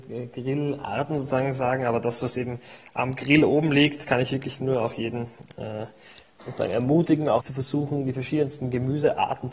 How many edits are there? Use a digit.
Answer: 1